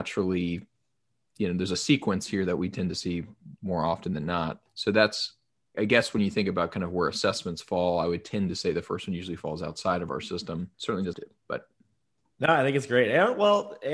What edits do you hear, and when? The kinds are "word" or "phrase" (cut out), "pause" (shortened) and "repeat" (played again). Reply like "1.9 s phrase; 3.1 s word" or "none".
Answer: 4.7 s pause; 5.7 s word; 10.7 s pause; 11.1 s word